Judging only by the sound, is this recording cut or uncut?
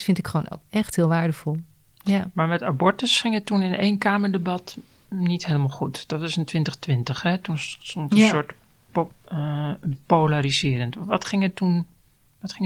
uncut